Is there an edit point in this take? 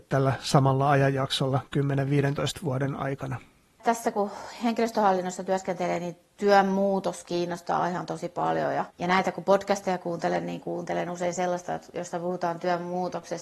yes; 1 cut; at 8.9 s

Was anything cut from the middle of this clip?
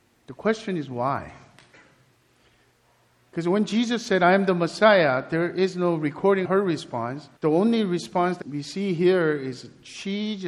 yes; 3 cuts; at 6.4 s, 7.4 s, 8.4 s

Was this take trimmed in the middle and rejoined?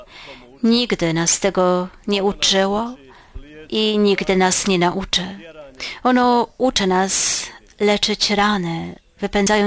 no; 0 cuts

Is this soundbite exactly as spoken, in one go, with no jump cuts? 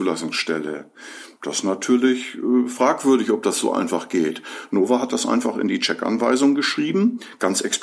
yes; 0 cuts

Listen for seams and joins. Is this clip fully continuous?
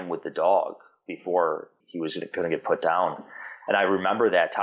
yes; 0 cuts

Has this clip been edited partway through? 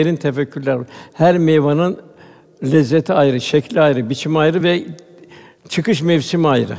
no; 0 cuts

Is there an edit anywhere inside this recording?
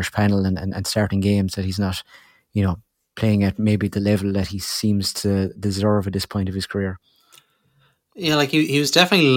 no; 0 cuts

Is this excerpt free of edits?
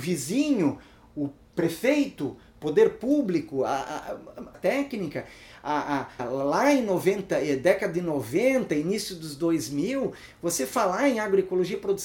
no; 2 cuts; at 4.5 s, 6.2 s

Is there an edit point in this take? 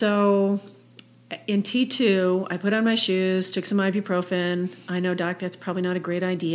no; 0 cuts

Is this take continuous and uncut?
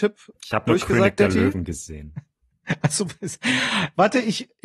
yes; 0 cuts

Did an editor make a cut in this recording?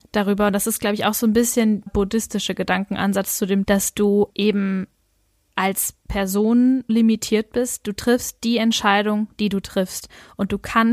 yes; 4 cuts; at 1.9 s, 3.6 s, 4.3 s, 6.9 s

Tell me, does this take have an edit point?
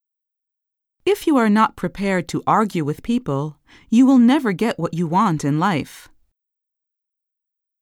no; 0 cuts

